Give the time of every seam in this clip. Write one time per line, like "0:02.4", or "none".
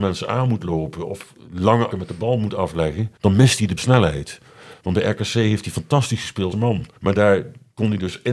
0:01.9
0:03.2
0:03.8
0:06.5
0:06.9